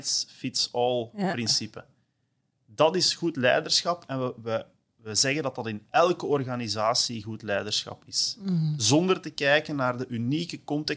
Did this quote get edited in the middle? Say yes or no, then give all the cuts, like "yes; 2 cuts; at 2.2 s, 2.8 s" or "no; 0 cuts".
no; 0 cuts